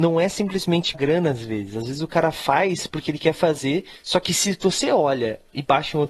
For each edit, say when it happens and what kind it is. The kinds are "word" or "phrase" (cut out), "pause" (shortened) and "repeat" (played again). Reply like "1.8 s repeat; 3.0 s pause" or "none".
0.9 s word